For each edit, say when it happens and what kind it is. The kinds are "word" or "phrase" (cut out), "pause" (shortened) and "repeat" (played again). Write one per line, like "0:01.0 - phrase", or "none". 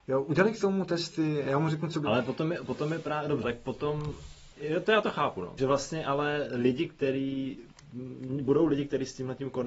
0:03.4 - word
0:04.5 - pause
0:05.6 - word

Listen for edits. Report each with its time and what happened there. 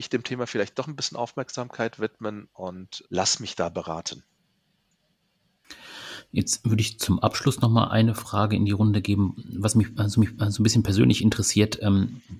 0:03.0 - word
0:10.2 - repeat

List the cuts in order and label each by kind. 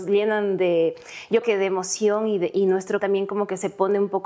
0:01.4 - word
0:03.0 - word

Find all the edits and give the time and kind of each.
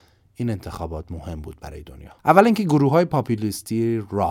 0:02.2 - pause

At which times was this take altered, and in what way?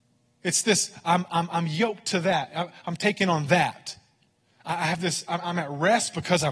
none

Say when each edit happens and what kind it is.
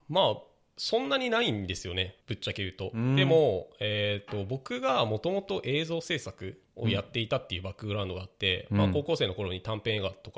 0:02.2 - pause

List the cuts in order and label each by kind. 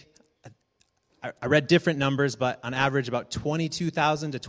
none

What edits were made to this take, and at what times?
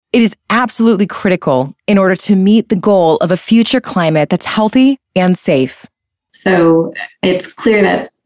none

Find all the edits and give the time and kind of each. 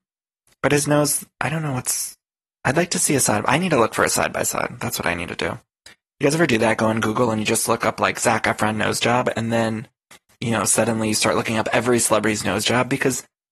none

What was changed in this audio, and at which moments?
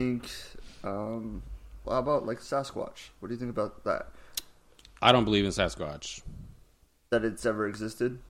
0:01.8 - word

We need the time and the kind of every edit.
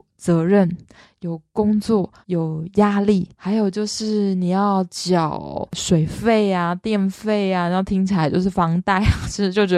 0:02.2 - pause
0:03.3 - pause

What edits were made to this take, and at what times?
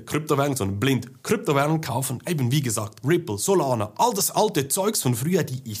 0:03.0 - word

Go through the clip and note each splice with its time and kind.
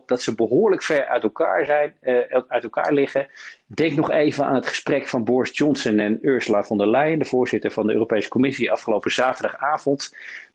none

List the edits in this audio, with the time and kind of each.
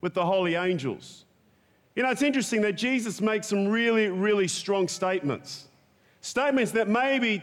none

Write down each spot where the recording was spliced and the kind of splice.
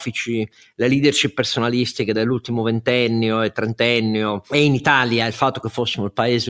none

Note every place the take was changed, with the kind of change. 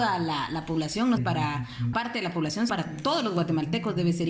0:01.2 - word
0:01.9 - word
0:02.7 - word

